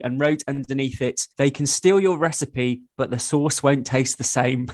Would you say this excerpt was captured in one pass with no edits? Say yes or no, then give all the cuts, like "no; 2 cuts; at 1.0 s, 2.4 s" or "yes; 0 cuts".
no; 1 cut; at 1.3 s